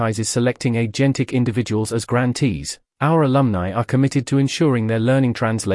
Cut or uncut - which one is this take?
uncut